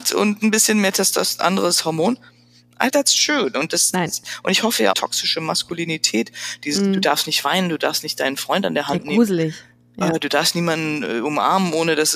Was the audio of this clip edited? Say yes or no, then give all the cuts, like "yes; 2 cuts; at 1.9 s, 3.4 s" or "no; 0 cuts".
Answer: yes; 2 cuts; at 2.9 s, 4.9 s